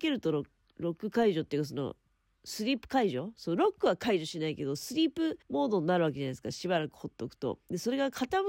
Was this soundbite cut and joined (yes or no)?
yes